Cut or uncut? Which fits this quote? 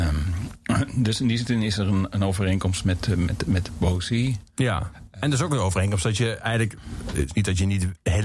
uncut